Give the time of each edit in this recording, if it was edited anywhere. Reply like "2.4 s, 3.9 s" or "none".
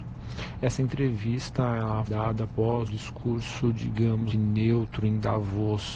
2.1 s, 2.9 s, 4.3 s